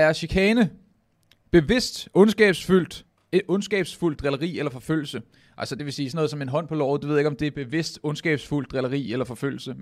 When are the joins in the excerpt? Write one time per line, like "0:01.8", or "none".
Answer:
none